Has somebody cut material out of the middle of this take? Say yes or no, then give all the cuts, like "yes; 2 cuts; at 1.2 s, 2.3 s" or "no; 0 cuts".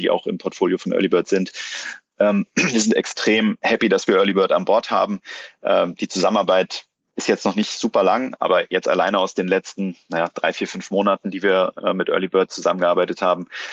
no; 0 cuts